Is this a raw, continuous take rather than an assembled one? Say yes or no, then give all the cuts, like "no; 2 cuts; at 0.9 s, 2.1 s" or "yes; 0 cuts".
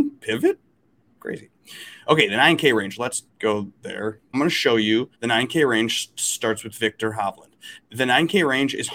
no; 4 cuts; at 3.3 s, 4.3 s, 5.1 s, 7.8 s